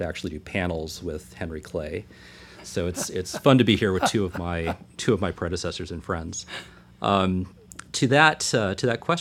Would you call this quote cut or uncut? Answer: uncut